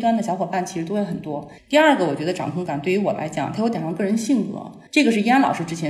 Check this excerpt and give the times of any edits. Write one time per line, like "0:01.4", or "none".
0:04.9

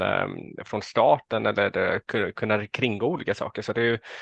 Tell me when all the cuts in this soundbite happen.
none

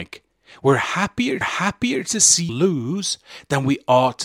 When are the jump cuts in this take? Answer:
0:01.4
0:02.5

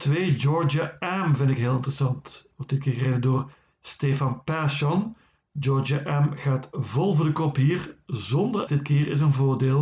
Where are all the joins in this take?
0:08.7

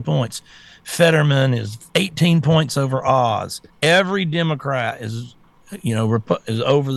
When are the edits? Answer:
0:01.9
0:03.7

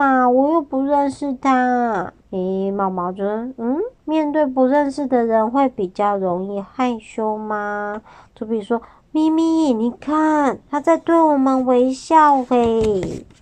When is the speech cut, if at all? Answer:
0:02.2
0:04.0
0:08.8
0:10.6

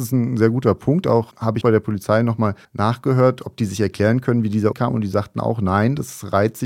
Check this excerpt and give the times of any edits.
0:01.3
0:01.6
0:02.6
0:04.7

